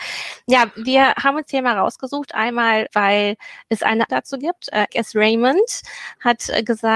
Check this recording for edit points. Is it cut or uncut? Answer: cut